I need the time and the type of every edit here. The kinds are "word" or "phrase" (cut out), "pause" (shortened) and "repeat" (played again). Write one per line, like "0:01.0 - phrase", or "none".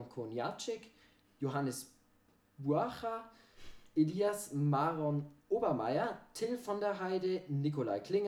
none